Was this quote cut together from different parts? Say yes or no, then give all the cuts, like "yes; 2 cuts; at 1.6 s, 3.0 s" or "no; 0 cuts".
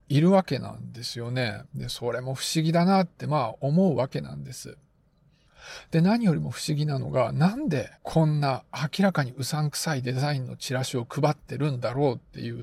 yes; 2 cuts; at 1.7 s, 8.0 s